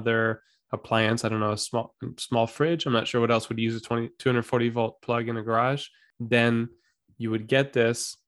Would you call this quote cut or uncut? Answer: uncut